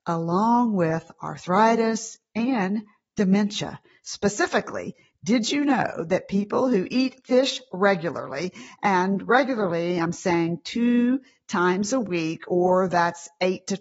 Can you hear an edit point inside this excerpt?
no; 0 cuts

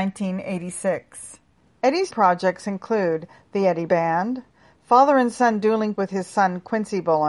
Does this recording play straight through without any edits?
no; 3 cuts; at 2.1 s, 3.9 s, 5.9 s

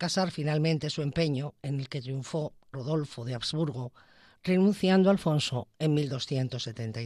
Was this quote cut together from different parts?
no; 0 cuts

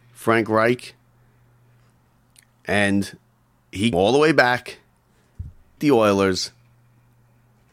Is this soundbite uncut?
no; 2 cuts; at 3.9 s, 5.8 s

